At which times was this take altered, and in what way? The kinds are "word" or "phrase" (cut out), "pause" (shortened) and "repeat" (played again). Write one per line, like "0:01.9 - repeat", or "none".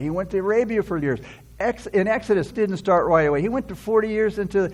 0:01.0 - phrase
0:02.5 - word